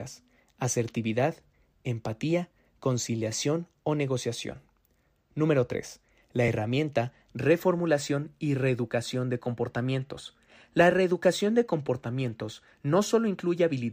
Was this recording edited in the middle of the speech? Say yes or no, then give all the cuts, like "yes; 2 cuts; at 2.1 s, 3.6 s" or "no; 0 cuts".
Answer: no; 0 cuts